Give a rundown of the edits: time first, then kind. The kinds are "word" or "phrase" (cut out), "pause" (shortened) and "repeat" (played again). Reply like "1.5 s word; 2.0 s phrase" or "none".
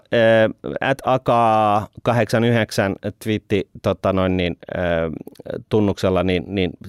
none